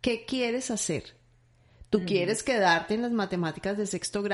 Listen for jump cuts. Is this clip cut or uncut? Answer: uncut